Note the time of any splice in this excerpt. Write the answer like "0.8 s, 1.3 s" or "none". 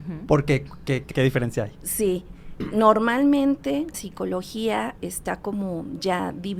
1.1 s, 2.6 s, 3.9 s, 5.0 s